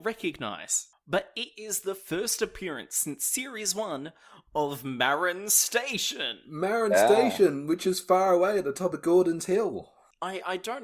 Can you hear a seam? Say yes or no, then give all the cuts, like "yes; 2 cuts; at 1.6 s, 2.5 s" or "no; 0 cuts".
no; 0 cuts